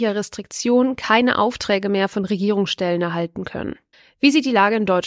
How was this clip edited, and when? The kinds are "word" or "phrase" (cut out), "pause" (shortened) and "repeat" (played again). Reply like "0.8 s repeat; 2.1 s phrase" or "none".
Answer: 3.9 s pause